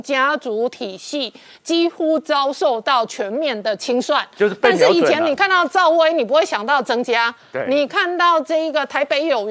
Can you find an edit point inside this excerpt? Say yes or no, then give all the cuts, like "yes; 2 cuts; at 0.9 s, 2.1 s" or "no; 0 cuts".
no; 0 cuts